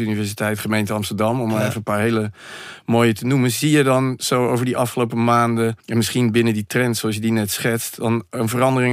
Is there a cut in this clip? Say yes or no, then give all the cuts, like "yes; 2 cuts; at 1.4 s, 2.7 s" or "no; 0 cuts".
yes; 1 cut; at 5.8 s